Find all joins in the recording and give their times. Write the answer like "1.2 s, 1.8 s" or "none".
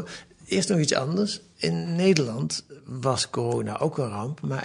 none